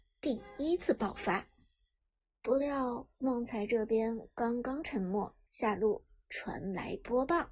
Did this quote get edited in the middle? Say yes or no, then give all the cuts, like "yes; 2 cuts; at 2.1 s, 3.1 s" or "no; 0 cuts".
yes; 3 cuts; at 2.1 s, 3.1 s, 5.4 s